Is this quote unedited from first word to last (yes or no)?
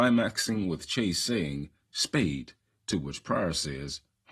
yes